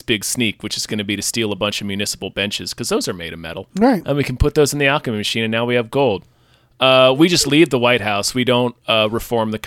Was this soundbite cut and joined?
yes; 1 cut; at 3.7 s

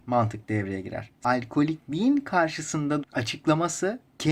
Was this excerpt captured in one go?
no; 1 cut; at 3.0 s

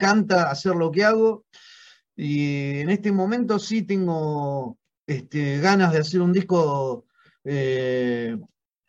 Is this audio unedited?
yes; 0 cuts

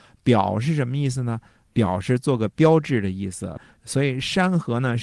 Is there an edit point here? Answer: no; 0 cuts

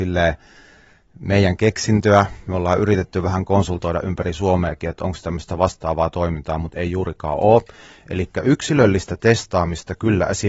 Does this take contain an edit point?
no; 0 cuts

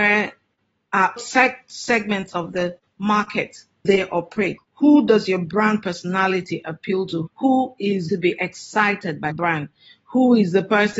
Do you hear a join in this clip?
yes; 6 cuts; at 1.2 s, 3.8 s, 4.6 s, 7.3 s, 8.1 s, 9.3 s

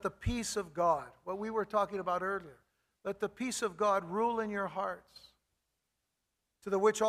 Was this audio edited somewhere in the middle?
no; 0 cuts

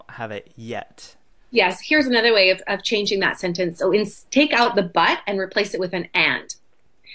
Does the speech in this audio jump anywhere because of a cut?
no; 0 cuts

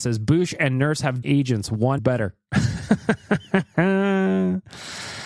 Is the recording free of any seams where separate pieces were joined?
no; 2 cuts; at 1.2 s, 2.0 s

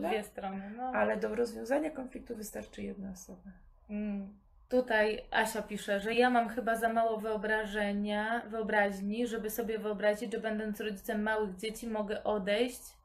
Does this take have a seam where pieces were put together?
no; 0 cuts

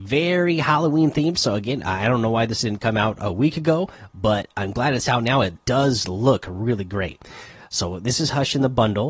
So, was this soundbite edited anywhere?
no; 0 cuts

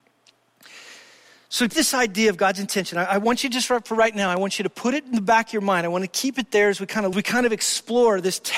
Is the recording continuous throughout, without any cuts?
no; 2 cuts; at 1.7 s, 7.1 s

